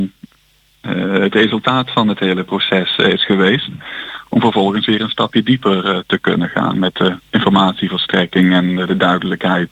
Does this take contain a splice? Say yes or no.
yes